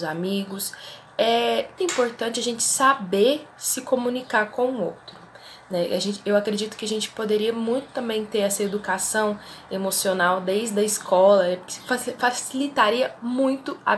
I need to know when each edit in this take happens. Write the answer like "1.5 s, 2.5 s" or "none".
1.8 s